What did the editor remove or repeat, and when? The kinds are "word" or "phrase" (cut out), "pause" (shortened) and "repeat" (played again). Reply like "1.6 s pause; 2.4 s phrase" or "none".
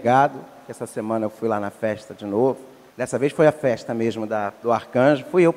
2.9 s pause